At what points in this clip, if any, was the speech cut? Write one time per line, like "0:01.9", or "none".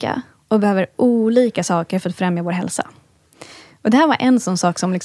none

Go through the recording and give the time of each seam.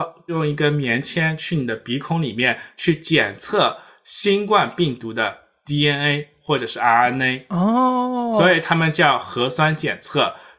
none

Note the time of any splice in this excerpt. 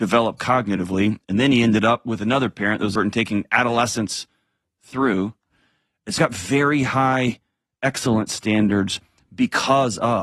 0:03.0
0:06.2

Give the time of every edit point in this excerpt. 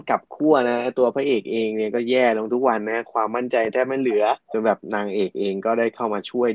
0:04.4

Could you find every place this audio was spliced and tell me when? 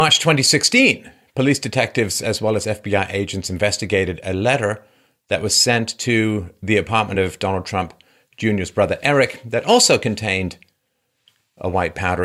none

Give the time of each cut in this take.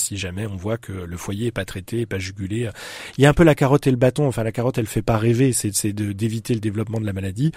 none

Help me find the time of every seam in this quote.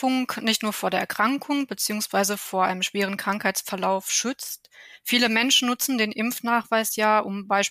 none

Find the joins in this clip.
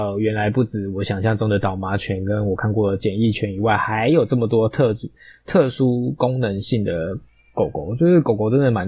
none

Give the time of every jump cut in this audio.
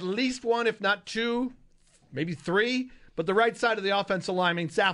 none

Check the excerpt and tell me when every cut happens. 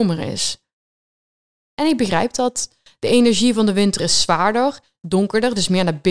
none

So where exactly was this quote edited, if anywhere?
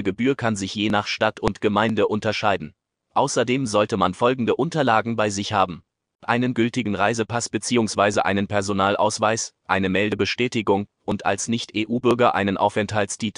none

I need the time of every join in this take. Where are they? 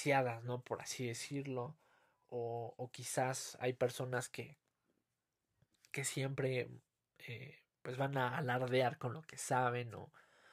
none

